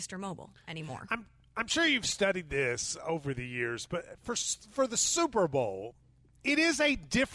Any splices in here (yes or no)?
no